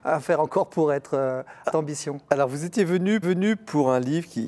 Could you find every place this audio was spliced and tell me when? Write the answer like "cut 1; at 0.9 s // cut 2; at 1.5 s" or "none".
cut 1; at 1.7 s // cut 2; at 3.2 s